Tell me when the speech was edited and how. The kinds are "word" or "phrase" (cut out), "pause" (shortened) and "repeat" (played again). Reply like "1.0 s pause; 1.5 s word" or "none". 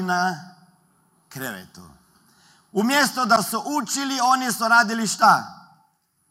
none